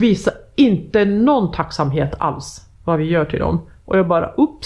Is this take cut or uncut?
cut